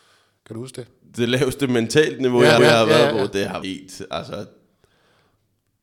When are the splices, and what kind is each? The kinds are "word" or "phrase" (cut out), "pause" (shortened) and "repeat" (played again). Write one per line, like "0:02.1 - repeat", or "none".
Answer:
0:02.6 - repeat
0:03.6 - word